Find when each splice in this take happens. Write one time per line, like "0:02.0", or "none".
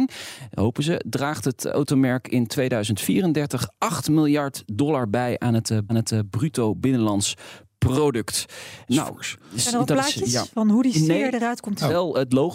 0:05.9